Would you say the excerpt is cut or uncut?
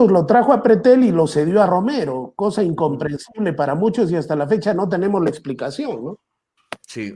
uncut